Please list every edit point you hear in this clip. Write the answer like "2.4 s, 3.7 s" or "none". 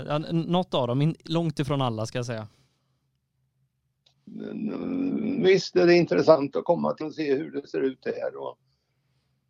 7.0 s

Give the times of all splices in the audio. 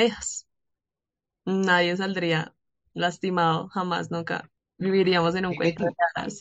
none

